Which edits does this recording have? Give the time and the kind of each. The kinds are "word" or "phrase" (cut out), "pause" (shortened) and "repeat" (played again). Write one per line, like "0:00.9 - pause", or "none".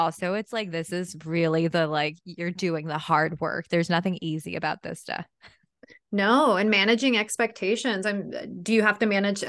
none